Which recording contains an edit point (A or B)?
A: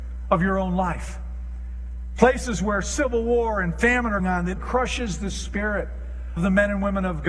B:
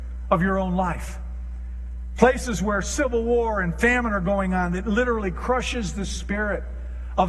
A